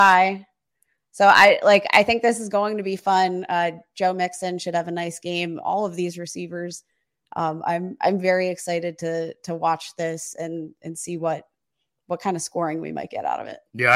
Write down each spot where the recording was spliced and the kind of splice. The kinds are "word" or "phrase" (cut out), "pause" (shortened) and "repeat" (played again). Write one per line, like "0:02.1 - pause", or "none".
none